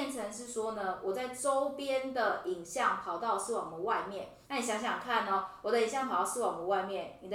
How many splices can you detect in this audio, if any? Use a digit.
1